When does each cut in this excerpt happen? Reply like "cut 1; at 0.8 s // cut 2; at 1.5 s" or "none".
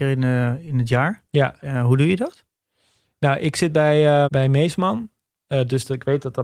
cut 1; at 4.2 s